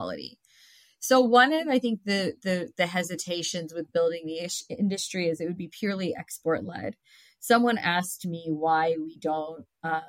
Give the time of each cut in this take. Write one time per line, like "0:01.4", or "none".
none